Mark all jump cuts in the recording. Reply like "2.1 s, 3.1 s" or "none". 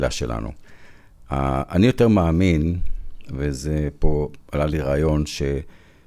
none